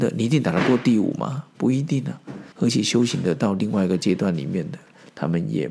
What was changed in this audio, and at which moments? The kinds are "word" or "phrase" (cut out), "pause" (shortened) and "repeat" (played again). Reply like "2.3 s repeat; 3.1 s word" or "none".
2.5 s pause